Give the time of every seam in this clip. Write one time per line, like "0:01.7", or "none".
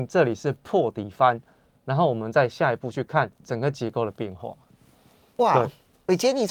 none